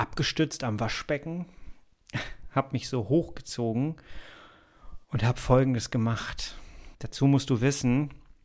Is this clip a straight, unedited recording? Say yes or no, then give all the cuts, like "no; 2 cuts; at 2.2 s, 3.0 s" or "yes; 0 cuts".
no; 2 cuts; at 5.0 s, 6.9 s